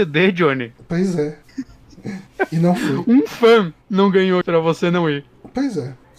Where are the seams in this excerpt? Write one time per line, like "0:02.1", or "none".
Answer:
0:01.4
0:03.8
0:04.4